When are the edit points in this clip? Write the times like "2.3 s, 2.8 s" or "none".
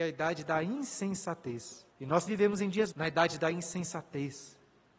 1.9 s, 2.3 s, 2.9 s